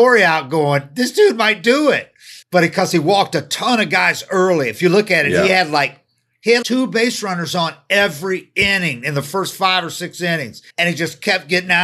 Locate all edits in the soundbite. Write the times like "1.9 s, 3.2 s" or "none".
2.4 s, 6.6 s, 10.7 s

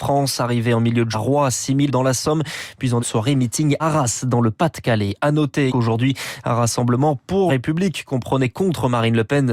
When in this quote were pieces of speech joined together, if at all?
1.1 s, 1.9 s, 3.0 s, 3.8 s, 5.7 s, 7.5 s

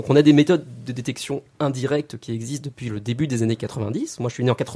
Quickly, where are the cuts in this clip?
none

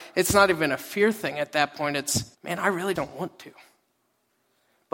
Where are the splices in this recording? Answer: 2.3 s, 3.0 s

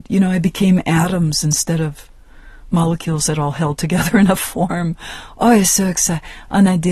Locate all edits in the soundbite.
none

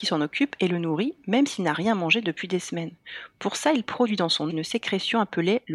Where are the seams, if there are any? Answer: 4.5 s

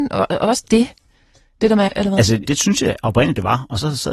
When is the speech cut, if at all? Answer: 1.9 s, 2.5 s

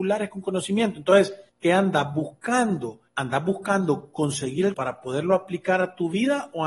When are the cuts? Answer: 1.5 s, 3.1 s, 4.7 s

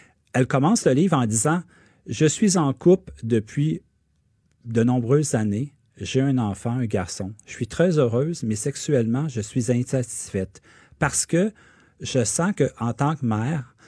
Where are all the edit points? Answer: none

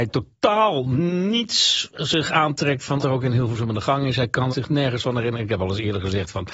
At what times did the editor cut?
3.0 s, 4.5 s

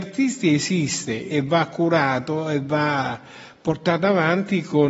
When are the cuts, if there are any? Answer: 1.3 s

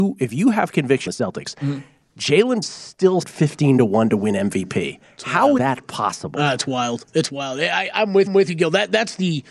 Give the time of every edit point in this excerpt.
1.1 s, 2.6 s, 3.2 s, 5.6 s, 8.3 s

